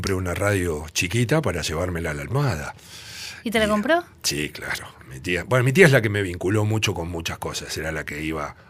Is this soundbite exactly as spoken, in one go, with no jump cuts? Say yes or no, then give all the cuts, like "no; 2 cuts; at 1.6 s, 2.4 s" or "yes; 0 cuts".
yes; 0 cuts